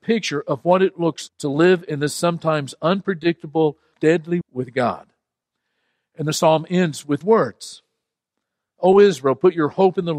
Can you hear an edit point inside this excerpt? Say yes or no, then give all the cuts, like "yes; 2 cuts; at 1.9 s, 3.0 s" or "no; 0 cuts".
yes; 4 cuts; at 1.3 s, 3.9 s, 4.4 s, 7.2 s